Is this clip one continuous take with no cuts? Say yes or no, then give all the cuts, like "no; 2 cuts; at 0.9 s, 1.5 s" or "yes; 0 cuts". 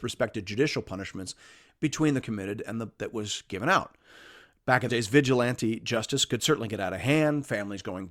no; 3 cuts; at 2.2 s, 3.0 s, 4.9 s